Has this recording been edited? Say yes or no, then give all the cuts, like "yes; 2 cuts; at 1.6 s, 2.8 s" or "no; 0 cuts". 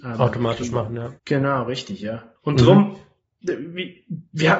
yes; 2 cuts; at 1.2 s, 2.4 s